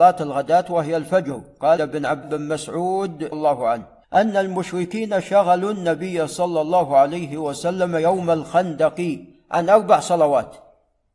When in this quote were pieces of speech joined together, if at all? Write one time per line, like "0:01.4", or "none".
0:01.8
0:02.2
0:03.3
0:04.0